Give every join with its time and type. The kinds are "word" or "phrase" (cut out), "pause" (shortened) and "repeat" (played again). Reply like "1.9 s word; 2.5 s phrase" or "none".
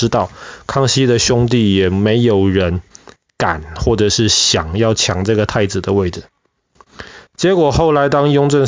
3.3 s pause